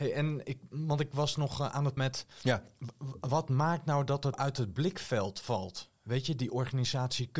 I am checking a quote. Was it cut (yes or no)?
yes